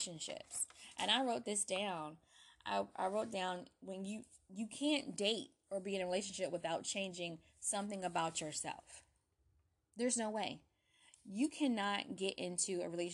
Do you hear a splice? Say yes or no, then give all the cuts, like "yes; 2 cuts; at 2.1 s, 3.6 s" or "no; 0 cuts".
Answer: no; 0 cuts